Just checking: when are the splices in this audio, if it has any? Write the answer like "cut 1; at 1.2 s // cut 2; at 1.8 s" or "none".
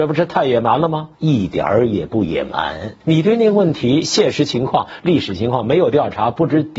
cut 1; at 1.2 s // cut 2; at 3.0 s